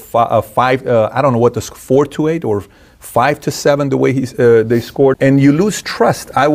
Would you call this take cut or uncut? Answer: cut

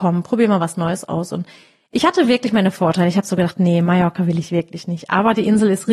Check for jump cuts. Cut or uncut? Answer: uncut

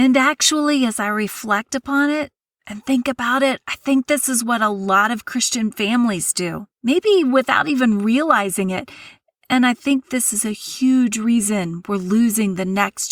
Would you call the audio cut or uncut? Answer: cut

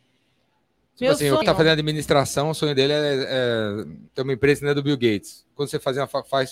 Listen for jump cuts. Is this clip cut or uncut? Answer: cut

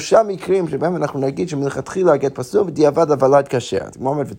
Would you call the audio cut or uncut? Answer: uncut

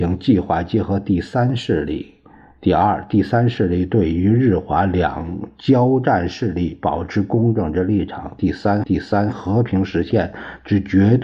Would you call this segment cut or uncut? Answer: cut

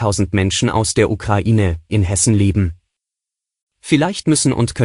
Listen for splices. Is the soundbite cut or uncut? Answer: cut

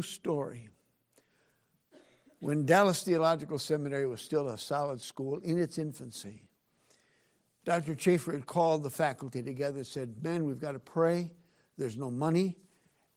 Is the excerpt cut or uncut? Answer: uncut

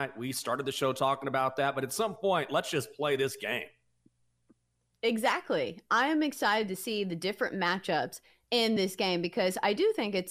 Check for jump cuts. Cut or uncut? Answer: uncut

